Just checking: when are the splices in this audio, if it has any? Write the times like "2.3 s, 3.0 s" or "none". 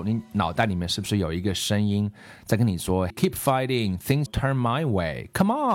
3.1 s, 4.3 s